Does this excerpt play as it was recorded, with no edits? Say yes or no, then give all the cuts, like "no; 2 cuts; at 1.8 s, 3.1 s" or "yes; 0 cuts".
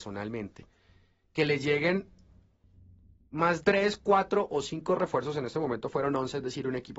no; 1 cut; at 3.6 s